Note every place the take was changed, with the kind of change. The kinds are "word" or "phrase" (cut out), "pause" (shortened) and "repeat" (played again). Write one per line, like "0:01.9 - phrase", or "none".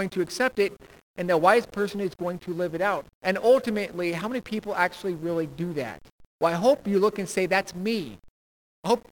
0:03.1 - pause